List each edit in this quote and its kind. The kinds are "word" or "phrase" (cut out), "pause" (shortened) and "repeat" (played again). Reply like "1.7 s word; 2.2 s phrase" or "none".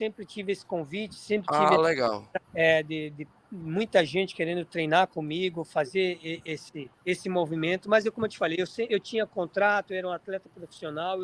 2.4 s pause; 6.9 s pause